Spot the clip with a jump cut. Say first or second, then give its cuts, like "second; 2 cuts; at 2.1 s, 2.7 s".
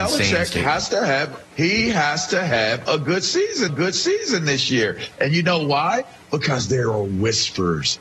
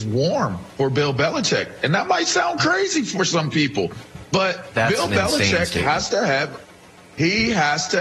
first; 2 cuts; at 1.5 s, 3.7 s